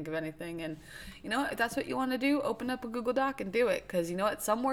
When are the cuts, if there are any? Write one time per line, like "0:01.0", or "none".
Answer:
none